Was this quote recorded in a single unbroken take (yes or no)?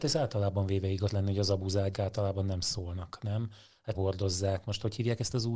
no